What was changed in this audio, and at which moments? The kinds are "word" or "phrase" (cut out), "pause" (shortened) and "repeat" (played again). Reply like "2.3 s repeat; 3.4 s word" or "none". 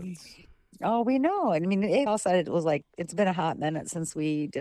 2.1 s phrase; 2.9 s pause